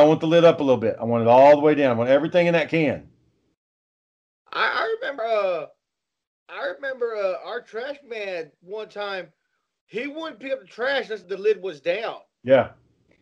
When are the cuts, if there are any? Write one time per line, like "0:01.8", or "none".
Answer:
0:05.2
0:11.2

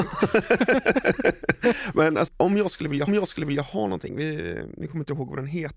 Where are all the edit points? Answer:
0:02.3
0:03.1

